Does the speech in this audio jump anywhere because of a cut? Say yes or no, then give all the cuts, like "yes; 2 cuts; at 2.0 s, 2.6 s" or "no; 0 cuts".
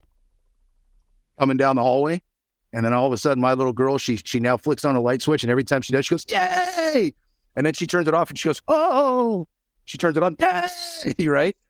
no; 0 cuts